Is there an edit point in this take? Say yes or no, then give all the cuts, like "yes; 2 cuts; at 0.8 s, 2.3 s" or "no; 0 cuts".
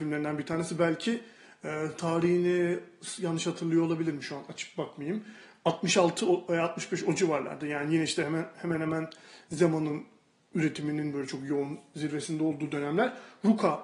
no; 0 cuts